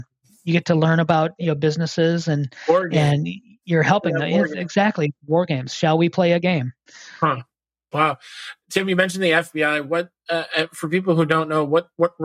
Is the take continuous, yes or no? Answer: yes